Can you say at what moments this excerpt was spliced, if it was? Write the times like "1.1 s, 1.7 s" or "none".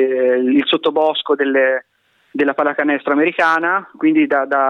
none